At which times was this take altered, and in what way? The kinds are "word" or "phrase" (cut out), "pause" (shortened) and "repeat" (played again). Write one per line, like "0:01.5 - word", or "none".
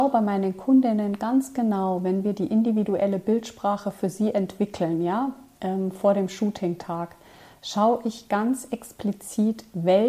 none